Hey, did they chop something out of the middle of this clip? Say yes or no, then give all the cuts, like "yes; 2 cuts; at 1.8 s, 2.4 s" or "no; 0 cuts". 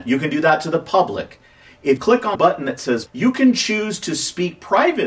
yes; 3 cuts; at 2.0 s, 2.3 s, 3.1 s